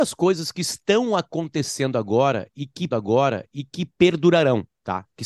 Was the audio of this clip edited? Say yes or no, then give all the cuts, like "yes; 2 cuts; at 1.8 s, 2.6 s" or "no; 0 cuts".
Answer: yes; 1 cut; at 2.9 s